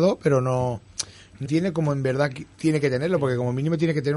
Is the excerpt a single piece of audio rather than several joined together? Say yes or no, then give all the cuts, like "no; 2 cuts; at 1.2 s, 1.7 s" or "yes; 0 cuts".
no; 2 cuts; at 1.5 s, 2.5 s